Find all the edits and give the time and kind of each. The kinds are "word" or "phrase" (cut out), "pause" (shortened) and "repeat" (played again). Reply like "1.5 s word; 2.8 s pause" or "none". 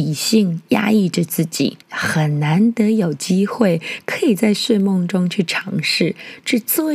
1.8 s pause